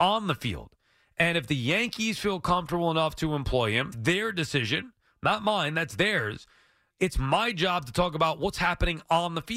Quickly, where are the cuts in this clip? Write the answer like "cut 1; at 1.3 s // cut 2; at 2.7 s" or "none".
cut 1; at 3.9 s